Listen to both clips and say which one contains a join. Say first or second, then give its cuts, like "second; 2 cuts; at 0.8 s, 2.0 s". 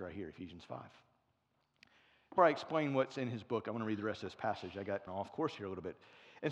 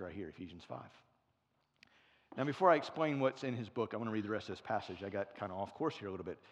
first; 2 cuts; at 2.4 s, 5.1 s